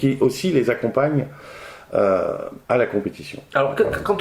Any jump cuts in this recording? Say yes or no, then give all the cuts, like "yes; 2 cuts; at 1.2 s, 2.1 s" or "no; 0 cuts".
yes; 1 cut; at 2.6 s